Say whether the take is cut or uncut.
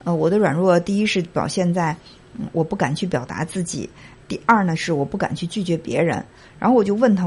uncut